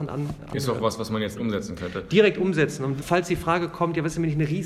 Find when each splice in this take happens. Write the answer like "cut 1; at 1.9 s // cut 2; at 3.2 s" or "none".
cut 1; at 1.4 s // cut 2; at 3.0 s